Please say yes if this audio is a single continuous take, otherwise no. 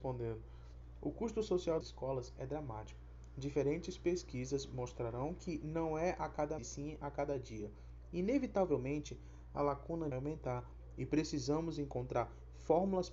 no